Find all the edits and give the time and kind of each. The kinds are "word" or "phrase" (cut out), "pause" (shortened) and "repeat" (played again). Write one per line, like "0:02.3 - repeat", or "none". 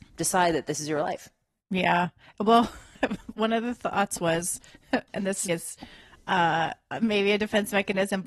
0:05.5 - word